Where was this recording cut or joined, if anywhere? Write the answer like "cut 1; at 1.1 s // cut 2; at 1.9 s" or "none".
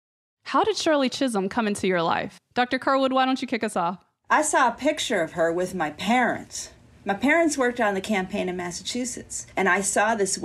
cut 1; at 9.5 s